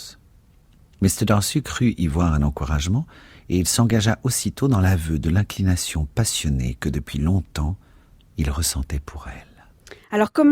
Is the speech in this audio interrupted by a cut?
no; 0 cuts

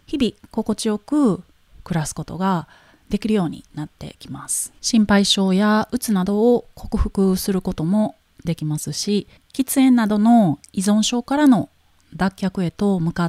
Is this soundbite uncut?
no; 2 cuts; at 4.8 s, 9.4 s

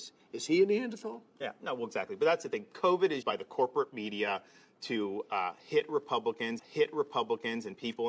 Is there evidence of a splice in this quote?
yes; 2 cuts; at 3.2 s, 6.6 s

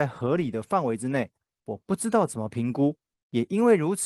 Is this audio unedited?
yes; 0 cuts

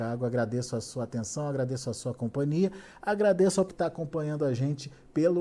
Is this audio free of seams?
no; 1 cut; at 3.7 s

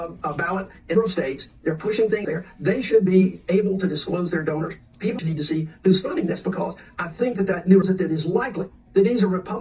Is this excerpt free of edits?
no; 4 cuts; at 0.9 s, 2.2 s, 5.2 s, 7.8 s

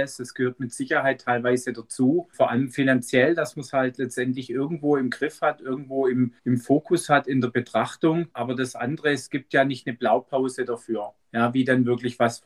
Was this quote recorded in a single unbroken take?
no; 3 cuts; at 2.3 s, 6.4 s, 11.2 s

